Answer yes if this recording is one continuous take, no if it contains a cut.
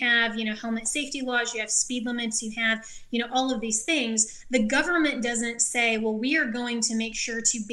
yes